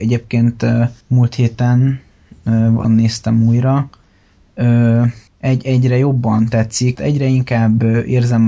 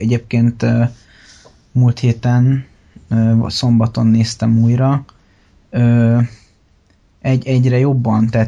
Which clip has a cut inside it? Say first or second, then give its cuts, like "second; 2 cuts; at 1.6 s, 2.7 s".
first; 4 cuts; at 1.0 s, 2.8 s, 5.3 s, 6.9 s